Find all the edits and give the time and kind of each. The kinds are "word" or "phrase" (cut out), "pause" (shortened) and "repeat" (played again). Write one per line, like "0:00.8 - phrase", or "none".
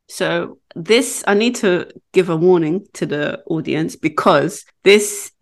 none